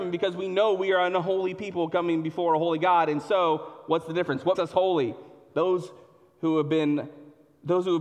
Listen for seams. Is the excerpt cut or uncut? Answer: cut